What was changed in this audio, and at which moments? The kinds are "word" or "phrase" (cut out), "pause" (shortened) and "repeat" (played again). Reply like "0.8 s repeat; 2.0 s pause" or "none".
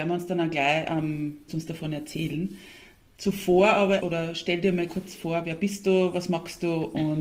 1.5 s word; 4.0 s word; 4.9 s word